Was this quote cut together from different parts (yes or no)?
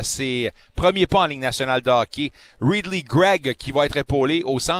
no